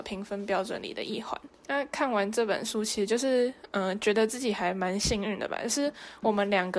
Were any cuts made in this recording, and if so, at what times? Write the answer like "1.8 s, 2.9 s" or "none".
1.5 s